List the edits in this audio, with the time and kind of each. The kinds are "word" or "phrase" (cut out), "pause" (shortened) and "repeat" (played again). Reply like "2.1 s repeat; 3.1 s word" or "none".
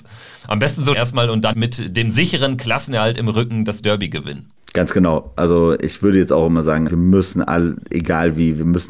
0.9 s phrase; 1.5 s word; 6.9 s word